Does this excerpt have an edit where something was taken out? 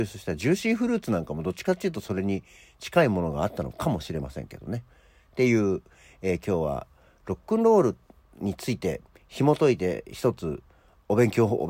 no; 0 cuts

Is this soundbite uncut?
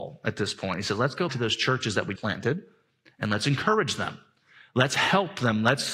no; 2 cuts; at 1.3 s, 2.2 s

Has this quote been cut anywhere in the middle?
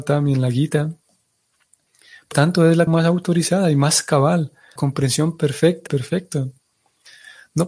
yes; 4 cuts; at 2.3 s, 2.9 s, 4.8 s, 5.9 s

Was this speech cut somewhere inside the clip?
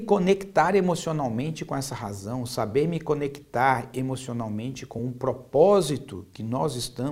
no; 0 cuts

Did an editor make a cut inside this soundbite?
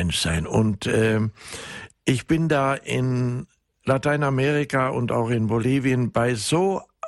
no; 0 cuts

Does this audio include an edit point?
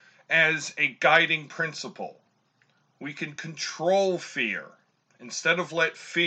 no; 0 cuts

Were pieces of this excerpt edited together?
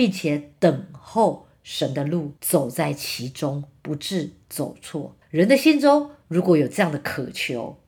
yes; 2 cuts; at 2.4 s, 5.2 s

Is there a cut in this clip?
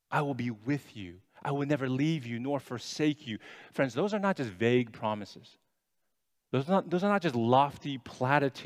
no; 0 cuts

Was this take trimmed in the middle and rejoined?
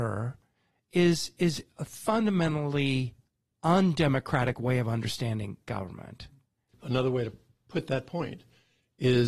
no; 0 cuts

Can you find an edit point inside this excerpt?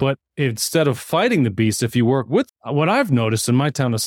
yes; 1 cut; at 2.5 s

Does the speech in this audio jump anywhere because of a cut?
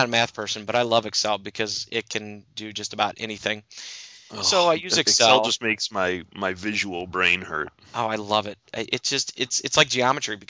no; 0 cuts

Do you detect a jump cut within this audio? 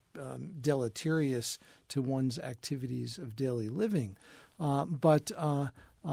no; 0 cuts

